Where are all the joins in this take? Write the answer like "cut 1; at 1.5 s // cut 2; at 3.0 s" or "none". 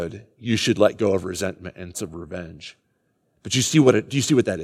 cut 1; at 1.9 s